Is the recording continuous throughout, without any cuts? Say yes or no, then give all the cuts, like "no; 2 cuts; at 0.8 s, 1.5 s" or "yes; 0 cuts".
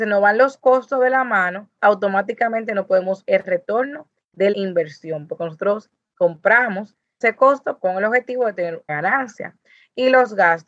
no; 6 cuts; at 1.8 s, 3.2 s, 4.5 s, 7.2 s, 7.8 s, 8.9 s